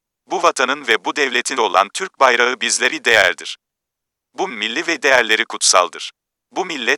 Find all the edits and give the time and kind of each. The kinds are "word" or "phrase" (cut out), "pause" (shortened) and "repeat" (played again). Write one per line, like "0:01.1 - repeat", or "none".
0:01.6 - word
0:02.9 - word
0:04.5 - word
0:05.0 - word